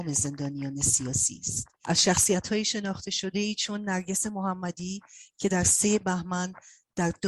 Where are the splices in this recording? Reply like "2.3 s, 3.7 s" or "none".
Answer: 1.7 s